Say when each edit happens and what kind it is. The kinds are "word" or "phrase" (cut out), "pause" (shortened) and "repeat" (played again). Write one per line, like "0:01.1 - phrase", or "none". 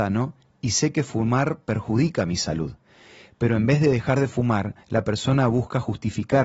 0:04.8 - pause